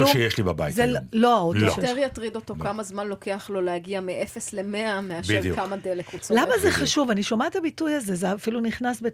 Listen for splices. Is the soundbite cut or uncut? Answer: uncut